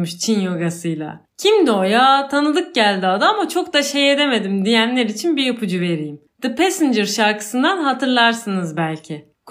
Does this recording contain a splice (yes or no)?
no